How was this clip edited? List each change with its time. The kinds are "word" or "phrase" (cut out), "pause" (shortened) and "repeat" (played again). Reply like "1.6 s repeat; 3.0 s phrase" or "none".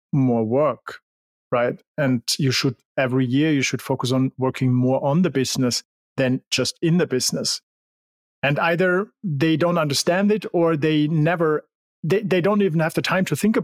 none